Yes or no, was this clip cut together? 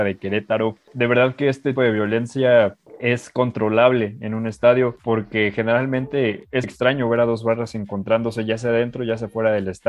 yes